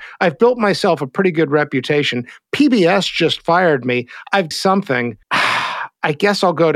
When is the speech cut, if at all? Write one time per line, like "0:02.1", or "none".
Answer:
0:04.5
0:05.2